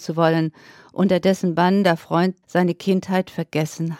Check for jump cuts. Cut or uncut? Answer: cut